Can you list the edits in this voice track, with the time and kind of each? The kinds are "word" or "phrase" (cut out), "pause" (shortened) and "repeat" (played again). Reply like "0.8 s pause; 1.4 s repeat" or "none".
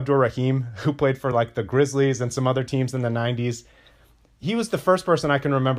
none